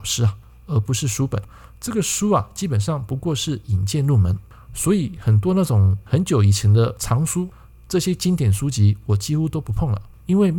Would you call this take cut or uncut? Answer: uncut